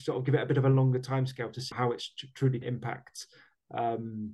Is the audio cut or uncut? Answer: cut